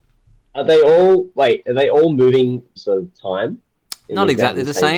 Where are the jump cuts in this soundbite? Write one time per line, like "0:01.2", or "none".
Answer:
0:02.8